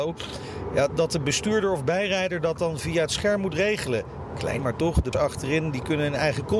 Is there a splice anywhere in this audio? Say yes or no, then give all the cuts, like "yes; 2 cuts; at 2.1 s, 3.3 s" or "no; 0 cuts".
yes; 2 cuts; at 4.6 s, 5.1 s